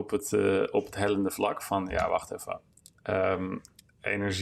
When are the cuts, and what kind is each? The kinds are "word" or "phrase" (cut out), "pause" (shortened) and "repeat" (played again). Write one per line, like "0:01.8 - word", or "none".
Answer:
none